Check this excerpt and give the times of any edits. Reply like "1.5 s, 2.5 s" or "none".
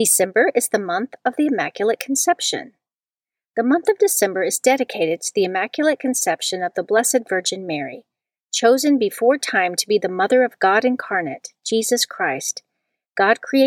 none